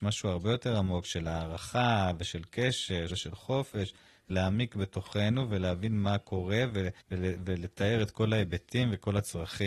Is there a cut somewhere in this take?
yes; 3 cuts; at 3.1 s, 4.3 s, 7.0 s

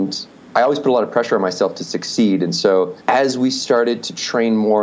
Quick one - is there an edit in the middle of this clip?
yes; 1 cut; at 3.0 s

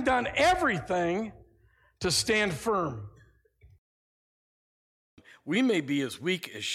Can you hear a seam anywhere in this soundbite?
no; 0 cuts

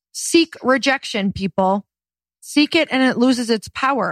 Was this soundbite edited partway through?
no; 0 cuts

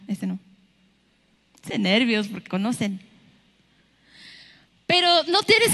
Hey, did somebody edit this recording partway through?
yes; 2 cuts; at 1.7 s, 2.5 s

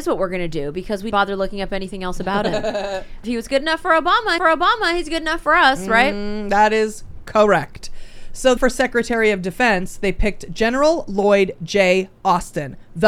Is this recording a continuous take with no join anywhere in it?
no; 4 cuts; at 1.1 s, 3.2 s, 4.4 s, 8.6 s

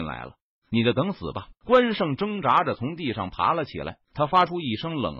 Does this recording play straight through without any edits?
no; 2 cuts; at 1.6 s, 4.0 s

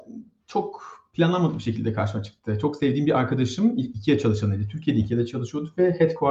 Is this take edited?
no; 0 cuts

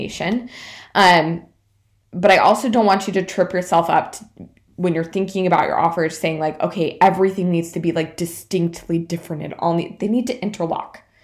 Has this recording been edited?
no; 0 cuts

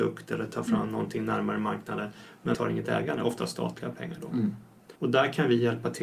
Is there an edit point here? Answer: yes; 2 cuts; at 2.5 s, 5.0 s

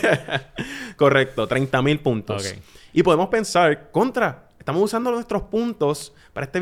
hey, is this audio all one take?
yes; 0 cuts

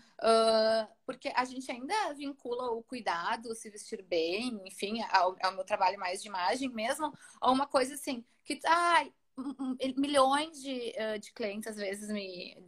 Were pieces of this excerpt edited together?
no; 0 cuts

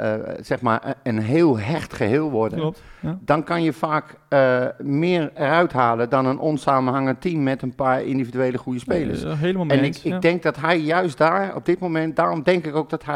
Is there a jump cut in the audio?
no; 0 cuts

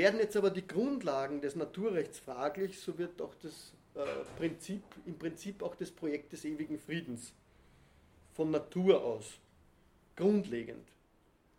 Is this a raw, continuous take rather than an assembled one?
yes; 0 cuts

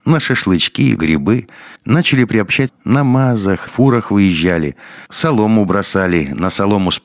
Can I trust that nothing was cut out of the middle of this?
no; 5 cuts; at 1.0 s, 1.8 s, 2.7 s, 3.7 s, 5.1 s

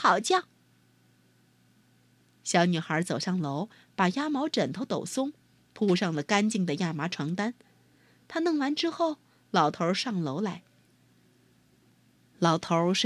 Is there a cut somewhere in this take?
no; 0 cuts

